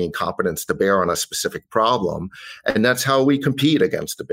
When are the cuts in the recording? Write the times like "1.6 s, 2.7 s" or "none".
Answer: none